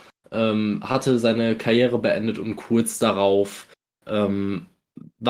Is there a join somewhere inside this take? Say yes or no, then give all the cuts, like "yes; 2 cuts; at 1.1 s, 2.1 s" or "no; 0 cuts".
no; 0 cuts